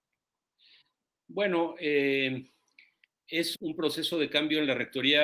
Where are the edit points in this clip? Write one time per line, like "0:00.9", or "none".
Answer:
0:03.5